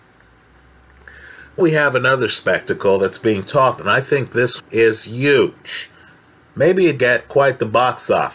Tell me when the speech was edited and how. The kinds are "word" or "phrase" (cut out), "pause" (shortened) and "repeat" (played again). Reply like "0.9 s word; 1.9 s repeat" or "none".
1.6 s word; 3.8 s word; 4.6 s word; 7.0 s word